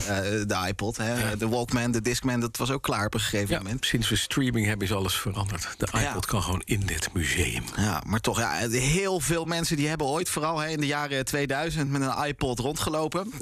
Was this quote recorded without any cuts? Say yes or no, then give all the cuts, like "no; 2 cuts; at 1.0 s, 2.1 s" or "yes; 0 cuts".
yes; 0 cuts